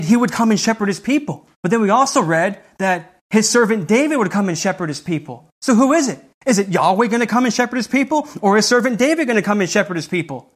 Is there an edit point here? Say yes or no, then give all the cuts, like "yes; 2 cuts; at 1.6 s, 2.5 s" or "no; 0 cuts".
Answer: yes; 2 cuts; at 1.5 s, 5.5 s